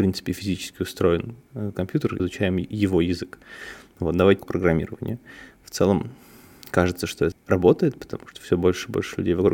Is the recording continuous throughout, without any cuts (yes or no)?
no